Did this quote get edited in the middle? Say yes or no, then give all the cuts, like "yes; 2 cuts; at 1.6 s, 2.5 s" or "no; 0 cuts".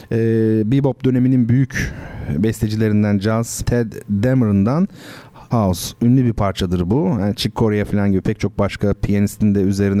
yes; 2 cuts; at 3.6 s, 5.5 s